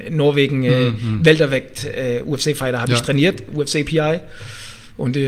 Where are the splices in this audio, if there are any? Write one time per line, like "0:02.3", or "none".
0:03.5